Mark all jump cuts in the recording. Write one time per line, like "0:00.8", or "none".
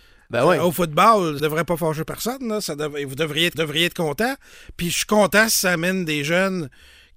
0:01.4
0:03.5